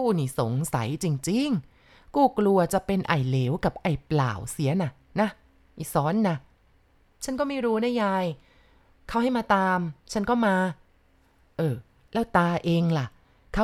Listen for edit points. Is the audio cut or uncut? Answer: uncut